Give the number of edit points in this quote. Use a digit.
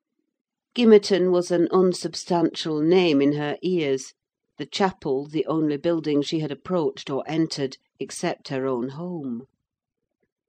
0